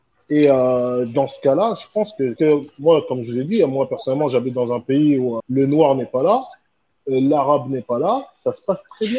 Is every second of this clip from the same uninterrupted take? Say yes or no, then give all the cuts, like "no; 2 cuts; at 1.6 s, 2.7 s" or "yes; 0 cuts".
no; 2 cuts; at 2.4 s, 5.4 s